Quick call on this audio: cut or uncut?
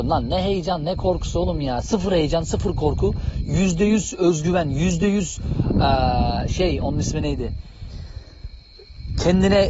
uncut